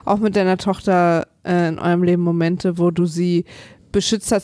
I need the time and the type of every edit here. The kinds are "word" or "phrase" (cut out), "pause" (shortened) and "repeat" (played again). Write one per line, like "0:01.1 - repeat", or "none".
none